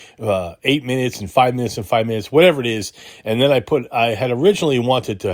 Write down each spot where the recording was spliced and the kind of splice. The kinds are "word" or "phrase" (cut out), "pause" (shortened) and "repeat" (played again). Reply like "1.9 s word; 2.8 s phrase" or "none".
none